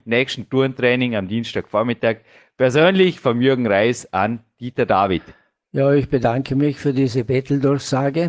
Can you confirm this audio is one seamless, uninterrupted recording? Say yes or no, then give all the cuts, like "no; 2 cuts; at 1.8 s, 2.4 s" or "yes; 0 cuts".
yes; 0 cuts